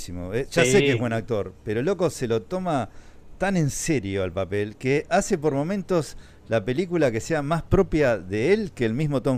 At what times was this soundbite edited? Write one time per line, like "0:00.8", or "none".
none